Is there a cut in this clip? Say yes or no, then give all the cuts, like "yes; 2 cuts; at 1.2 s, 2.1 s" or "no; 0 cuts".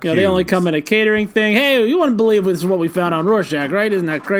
no; 0 cuts